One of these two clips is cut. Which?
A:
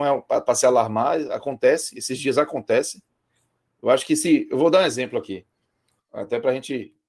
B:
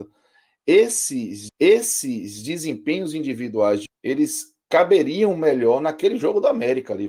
B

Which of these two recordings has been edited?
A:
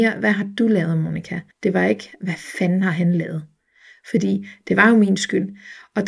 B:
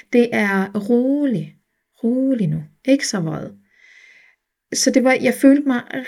A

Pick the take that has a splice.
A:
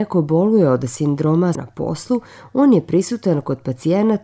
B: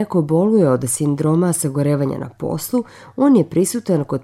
A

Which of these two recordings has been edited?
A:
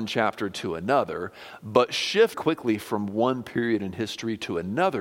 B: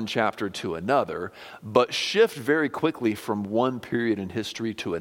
A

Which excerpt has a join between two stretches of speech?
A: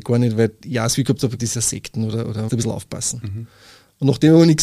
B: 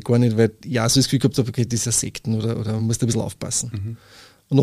A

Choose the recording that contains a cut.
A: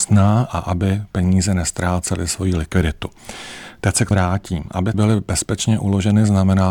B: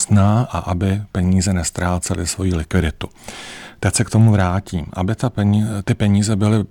A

